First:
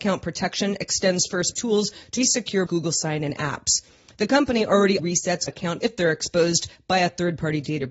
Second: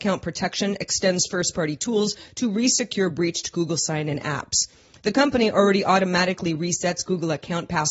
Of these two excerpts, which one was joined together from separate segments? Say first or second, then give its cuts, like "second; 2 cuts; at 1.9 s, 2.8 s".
first; 6 cuts; at 1.5 s, 2.2 s, 2.7 s, 5.0 s, 5.5 s, 5.8 s